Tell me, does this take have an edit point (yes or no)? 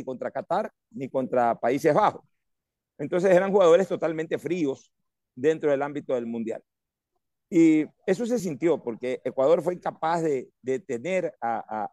no